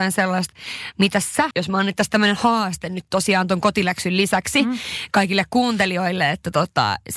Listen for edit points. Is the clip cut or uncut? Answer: cut